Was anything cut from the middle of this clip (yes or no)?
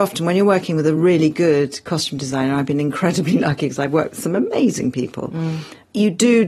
no